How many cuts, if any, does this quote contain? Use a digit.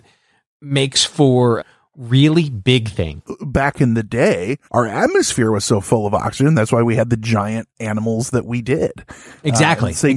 2